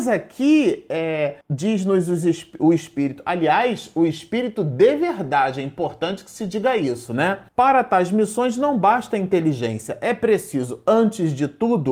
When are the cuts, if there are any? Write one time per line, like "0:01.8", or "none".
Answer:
0:01.4
0:07.5